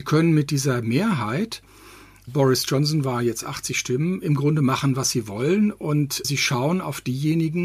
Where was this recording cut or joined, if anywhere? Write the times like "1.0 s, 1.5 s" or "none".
2.3 s, 6.2 s